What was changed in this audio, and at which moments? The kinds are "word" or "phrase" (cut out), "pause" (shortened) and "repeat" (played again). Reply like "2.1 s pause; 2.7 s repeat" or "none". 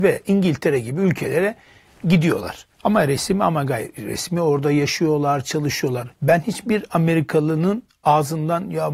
2.7 s pause; 6.2 s pause

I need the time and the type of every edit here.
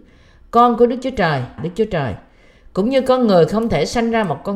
1.6 s word

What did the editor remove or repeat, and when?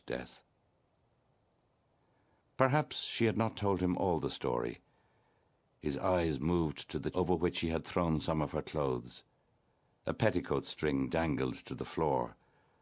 7.1 s word

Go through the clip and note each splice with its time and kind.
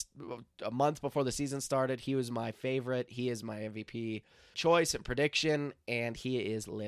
4.5 s word

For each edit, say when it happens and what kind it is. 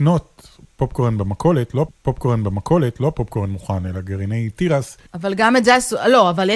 1.9 s repeat; 5.1 s pause

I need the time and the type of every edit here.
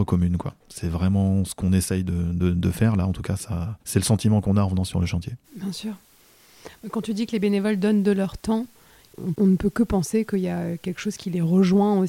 3.8 s pause; 5.4 s pause

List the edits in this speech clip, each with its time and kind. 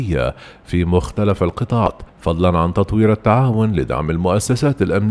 2.1 s pause

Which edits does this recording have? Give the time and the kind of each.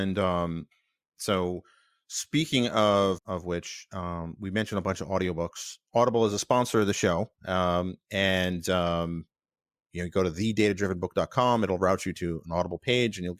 3.2 s word; 7.4 s pause

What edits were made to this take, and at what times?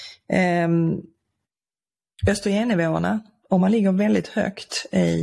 none

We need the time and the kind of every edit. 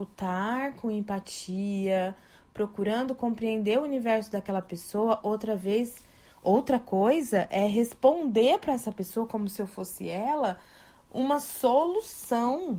none

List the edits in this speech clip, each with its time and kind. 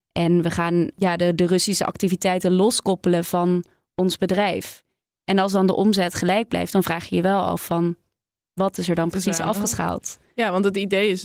none

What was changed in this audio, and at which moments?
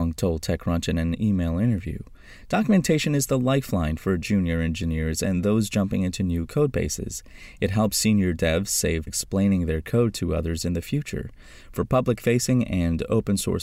9.1 s phrase

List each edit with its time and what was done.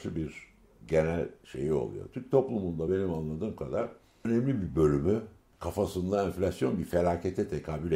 none

